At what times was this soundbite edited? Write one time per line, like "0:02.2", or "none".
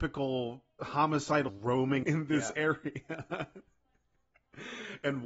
0:01.5
0:02.0